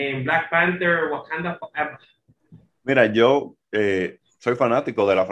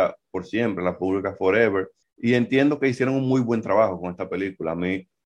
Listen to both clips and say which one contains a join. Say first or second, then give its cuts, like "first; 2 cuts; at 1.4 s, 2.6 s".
second; 1 cut; at 2.0 s